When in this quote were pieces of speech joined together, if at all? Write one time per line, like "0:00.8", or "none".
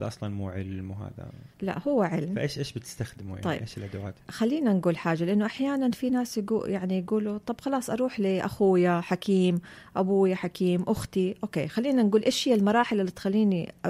0:01.5